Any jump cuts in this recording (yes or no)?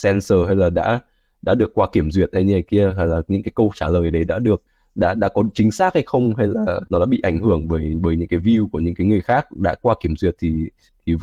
no